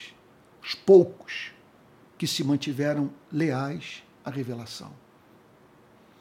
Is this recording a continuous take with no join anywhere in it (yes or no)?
yes